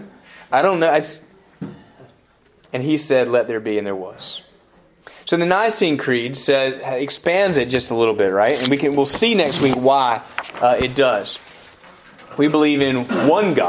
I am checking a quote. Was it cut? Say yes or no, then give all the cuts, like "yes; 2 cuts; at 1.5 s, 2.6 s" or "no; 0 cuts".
no; 0 cuts